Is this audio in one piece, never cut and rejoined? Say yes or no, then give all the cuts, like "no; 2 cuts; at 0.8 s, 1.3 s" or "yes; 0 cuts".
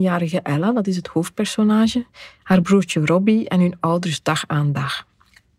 yes; 0 cuts